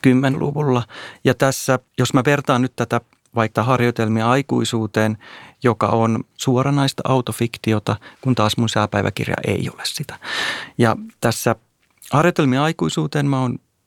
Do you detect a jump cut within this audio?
yes; 3 cuts; at 1.9 s, 3.6 s, 6.3 s

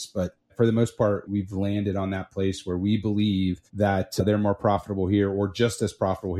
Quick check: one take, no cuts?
no; 1 cut; at 3.7 s

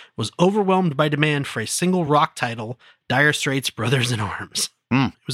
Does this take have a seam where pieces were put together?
no; 0 cuts

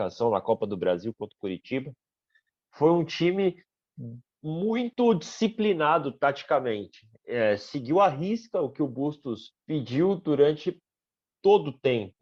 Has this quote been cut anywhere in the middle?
yes; 1 cut; at 9.6 s

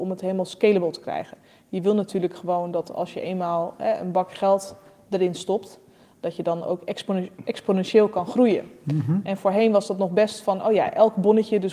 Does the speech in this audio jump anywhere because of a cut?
no; 0 cuts

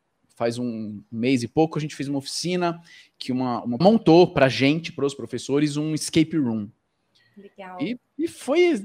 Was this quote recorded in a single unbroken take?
no; 1 cut; at 3.8 s

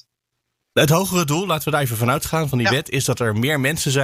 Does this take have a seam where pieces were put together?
no; 0 cuts

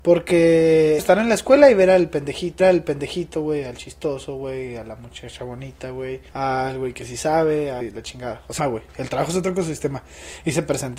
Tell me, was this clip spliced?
yes; 5 cuts; at 1.0 s, 2.6 s, 6.3 s, 7.8 s, 8.6 s

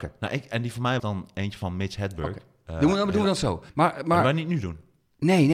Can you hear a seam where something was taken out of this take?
yes; 2 cuts; at 1.0 s, 3.7 s

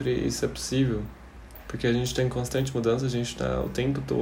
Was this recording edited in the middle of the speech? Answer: no; 0 cuts

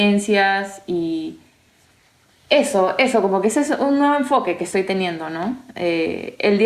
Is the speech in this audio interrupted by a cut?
no; 0 cuts

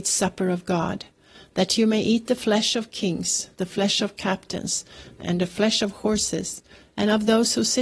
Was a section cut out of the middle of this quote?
yes; 1 cut; at 5.2 s

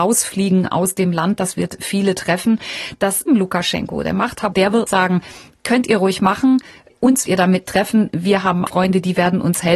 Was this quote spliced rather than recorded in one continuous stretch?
yes; 6 cuts; at 3.3 s, 4.5 s, 4.9 s, 7.3 s, 7.7 s, 8.7 s

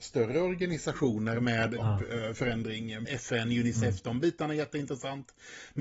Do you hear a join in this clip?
yes; 2 cuts; at 1.8 s, 3.1 s

